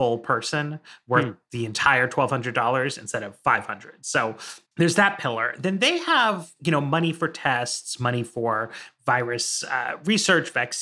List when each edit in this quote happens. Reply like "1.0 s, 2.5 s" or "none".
4.7 s